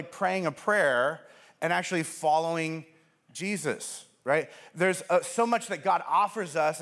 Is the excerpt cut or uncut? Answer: uncut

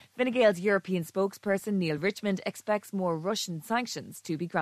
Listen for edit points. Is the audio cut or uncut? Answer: uncut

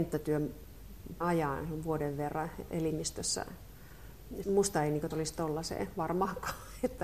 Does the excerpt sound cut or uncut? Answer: cut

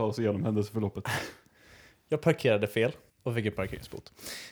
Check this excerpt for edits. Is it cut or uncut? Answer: cut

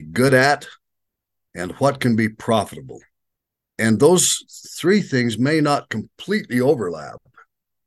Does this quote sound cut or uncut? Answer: uncut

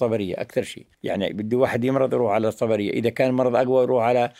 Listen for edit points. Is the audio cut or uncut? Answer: cut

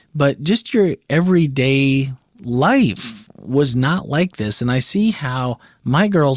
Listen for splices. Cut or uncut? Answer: uncut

